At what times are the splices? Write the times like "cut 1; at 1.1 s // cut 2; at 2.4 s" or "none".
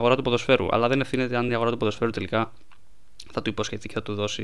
none

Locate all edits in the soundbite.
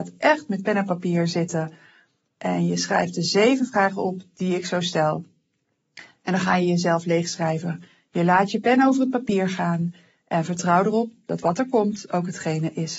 none

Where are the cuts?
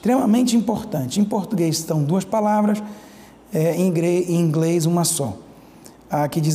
none

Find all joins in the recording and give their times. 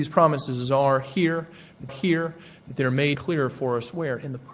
cut 1; at 1.9 s // cut 2; at 3.1 s

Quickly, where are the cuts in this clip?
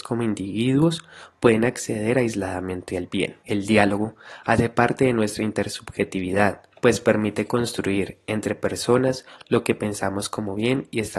cut 1; at 3.4 s // cut 2; at 6.7 s

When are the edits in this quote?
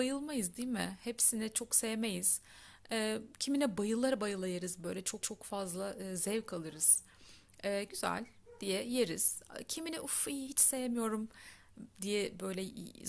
cut 1; at 5.2 s // cut 2; at 7.9 s

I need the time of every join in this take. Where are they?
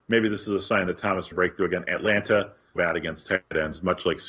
cut 1; at 1.3 s // cut 2; at 2.8 s

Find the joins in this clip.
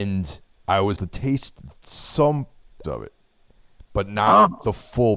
cut 1; at 1.0 s // cut 2; at 2.8 s

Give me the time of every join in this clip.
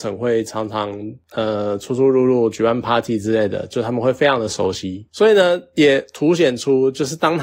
none

